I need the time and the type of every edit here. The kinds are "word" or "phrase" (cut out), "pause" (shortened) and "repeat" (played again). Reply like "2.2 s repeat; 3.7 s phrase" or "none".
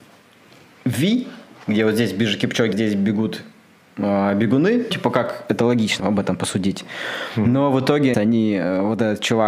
2.7 s word; 4.9 s word; 6.0 s word; 8.1 s word